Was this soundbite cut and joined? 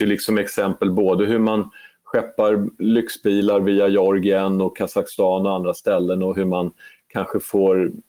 no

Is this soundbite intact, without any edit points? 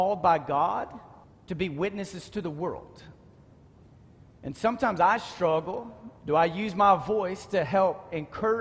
no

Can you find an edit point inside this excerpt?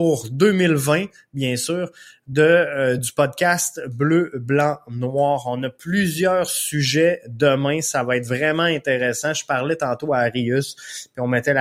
no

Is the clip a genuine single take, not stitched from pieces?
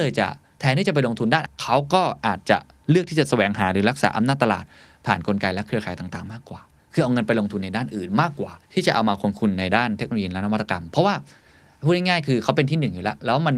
no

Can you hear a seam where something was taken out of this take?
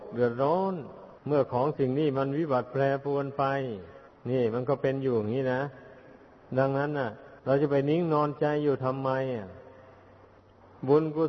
yes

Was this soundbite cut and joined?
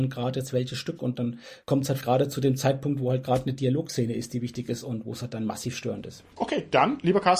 yes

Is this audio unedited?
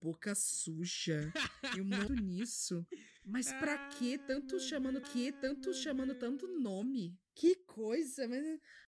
no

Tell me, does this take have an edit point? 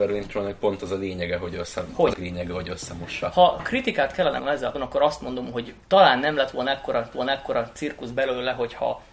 yes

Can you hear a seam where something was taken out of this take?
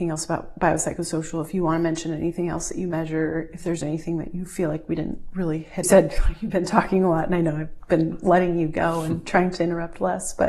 yes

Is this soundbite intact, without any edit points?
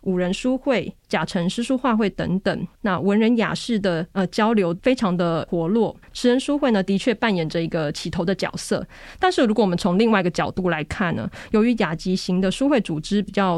no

